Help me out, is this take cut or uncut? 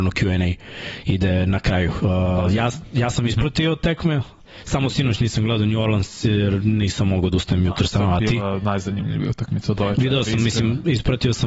uncut